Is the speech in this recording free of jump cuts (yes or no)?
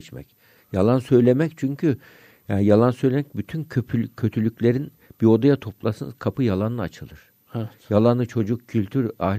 yes